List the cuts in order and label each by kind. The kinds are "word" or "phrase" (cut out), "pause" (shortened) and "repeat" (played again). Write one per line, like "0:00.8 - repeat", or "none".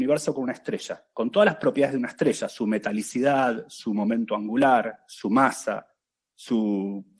none